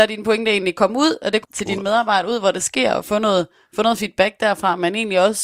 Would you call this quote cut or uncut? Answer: cut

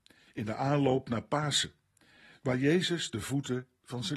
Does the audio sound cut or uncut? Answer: uncut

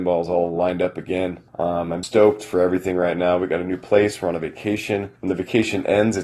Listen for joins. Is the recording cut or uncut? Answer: cut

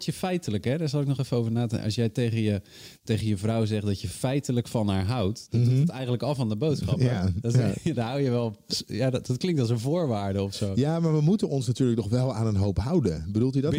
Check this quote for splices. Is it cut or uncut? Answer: uncut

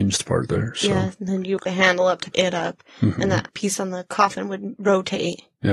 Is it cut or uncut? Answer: cut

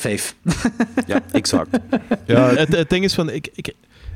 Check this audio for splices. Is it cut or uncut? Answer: cut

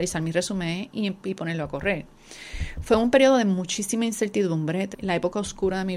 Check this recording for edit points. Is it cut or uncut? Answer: cut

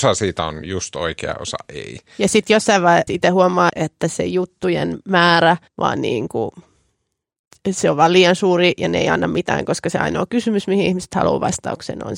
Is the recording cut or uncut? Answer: cut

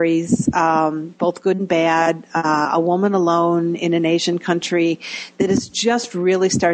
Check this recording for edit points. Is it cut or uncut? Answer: uncut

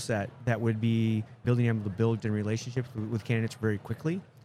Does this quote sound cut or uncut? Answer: cut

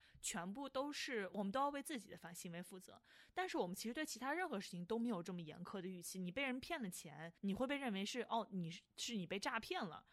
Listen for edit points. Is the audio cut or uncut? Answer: cut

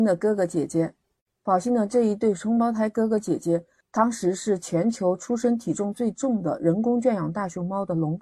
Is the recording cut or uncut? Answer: uncut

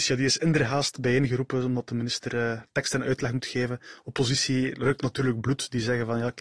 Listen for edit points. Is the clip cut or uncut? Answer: uncut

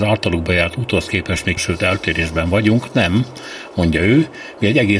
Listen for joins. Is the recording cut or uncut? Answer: cut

